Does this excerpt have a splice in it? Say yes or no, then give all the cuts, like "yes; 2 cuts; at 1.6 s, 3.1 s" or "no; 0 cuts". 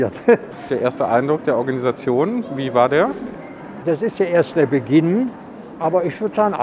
no; 0 cuts